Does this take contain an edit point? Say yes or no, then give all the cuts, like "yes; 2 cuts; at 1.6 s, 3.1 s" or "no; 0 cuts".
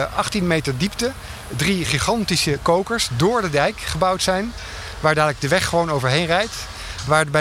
no; 0 cuts